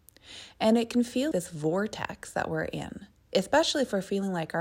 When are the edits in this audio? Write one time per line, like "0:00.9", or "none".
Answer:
0:01.3

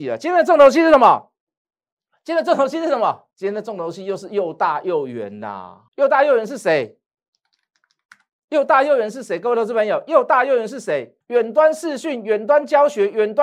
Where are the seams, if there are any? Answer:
0:03.3
0:05.9
0:11.2

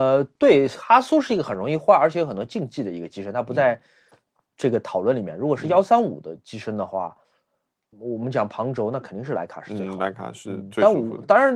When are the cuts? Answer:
0:07.9

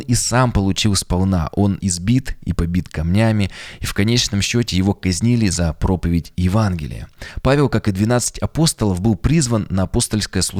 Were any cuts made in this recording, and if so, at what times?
0:01.8

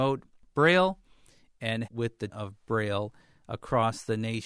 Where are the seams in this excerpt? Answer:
0:01.8
0:02.3

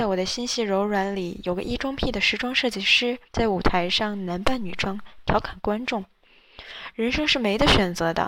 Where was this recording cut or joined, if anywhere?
0:03.2

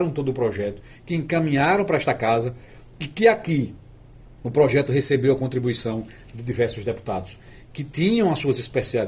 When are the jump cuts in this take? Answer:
none

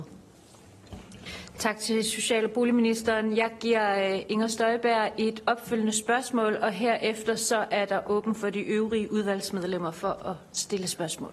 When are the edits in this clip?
none

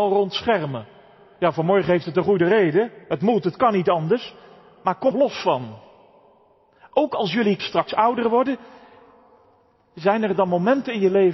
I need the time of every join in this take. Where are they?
0:03.0
0:05.1
0:07.6

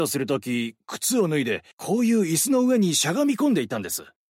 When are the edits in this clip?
0:01.7

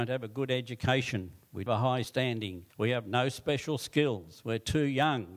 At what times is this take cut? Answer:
0:01.7
0:02.0
0:02.7

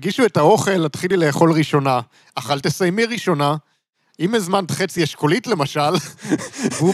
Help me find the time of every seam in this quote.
none

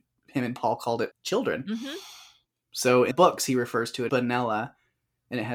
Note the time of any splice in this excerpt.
0:01.1
0:03.1
0:04.1

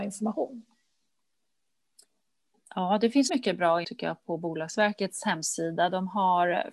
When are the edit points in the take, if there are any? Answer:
0:03.3
0:03.8

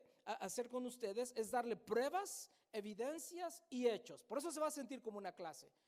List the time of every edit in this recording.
none

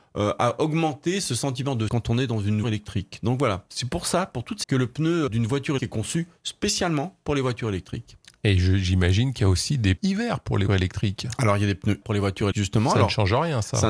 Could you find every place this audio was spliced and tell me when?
0:01.9
0:02.6
0:04.6
0:05.3
0:05.8
0:10.0
0:10.7
0:12.0
0:12.5

